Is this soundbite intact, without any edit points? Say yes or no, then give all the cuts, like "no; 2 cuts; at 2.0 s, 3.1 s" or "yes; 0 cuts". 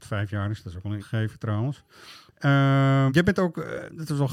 no; 2 cuts; at 1.0 s, 3.1 s